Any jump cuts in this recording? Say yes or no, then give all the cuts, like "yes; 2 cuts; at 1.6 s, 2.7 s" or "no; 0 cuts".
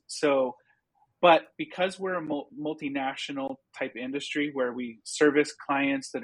no; 0 cuts